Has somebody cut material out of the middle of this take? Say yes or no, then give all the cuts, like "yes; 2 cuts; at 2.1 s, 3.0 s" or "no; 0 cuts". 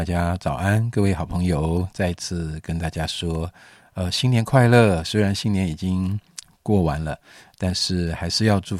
no; 0 cuts